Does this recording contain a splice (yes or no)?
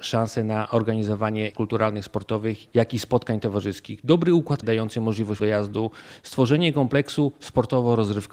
yes